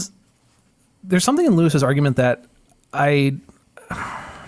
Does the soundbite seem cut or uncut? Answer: uncut